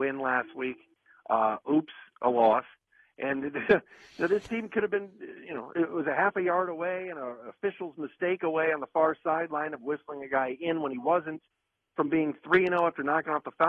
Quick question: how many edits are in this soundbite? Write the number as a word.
zero